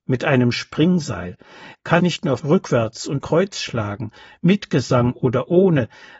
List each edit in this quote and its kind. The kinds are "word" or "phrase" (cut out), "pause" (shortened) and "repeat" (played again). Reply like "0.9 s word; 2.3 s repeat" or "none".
2.0 s word; 2.4 s word; 3.2 s word